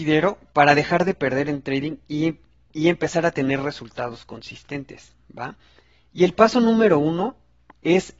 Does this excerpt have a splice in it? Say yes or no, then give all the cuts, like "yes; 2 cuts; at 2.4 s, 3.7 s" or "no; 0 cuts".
no; 0 cuts